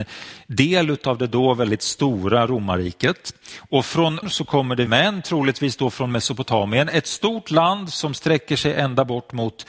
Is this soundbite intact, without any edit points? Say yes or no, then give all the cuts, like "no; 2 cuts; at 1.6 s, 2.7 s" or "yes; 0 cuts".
no; 2 cuts; at 4.2 s, 4.9 s